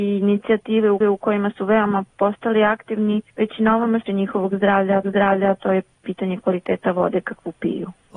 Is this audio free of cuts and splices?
no; 5 cuts; at 1.0 s, 2.1 s, 3.3 s, 4.1 s, 5.0 s

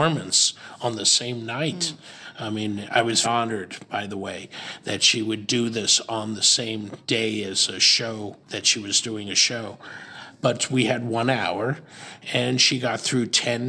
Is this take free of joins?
no; 3 cuts; at 3.2 s, 7.0 s, 8.4 s

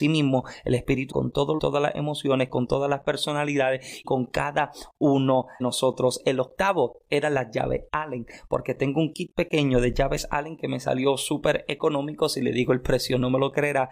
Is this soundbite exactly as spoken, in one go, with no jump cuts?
no; 4 cuts; at 1.1 s, 1.6 s, 4.0 s, 5.6 s

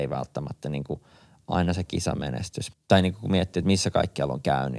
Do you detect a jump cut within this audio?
no; 0 cuts

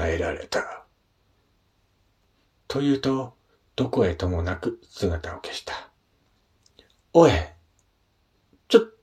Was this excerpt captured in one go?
yes; 0 cuts

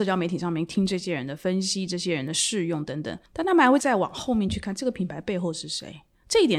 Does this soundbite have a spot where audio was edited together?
yes; 1 cut; at 3.3 s

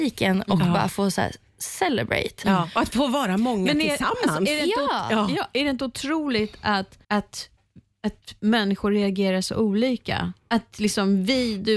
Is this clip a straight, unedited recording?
no; 1 cut; at 7.0 s

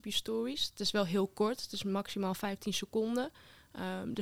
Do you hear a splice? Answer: no; 0 cuts

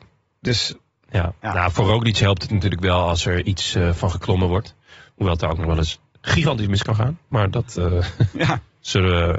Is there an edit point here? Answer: no; 0 cuts

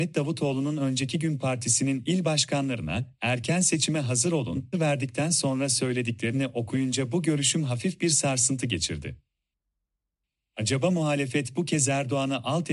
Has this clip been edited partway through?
yes; 1 cut; at 4.7 s

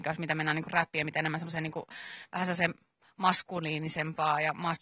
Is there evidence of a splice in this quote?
no; 0 cuts

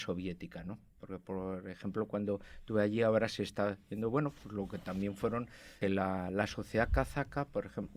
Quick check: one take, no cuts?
no; 1 cut; at 5.8 s

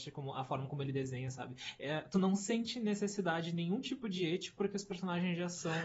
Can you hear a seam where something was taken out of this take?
no; 0 cuts

